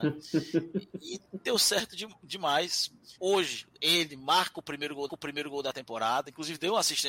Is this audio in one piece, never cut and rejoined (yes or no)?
no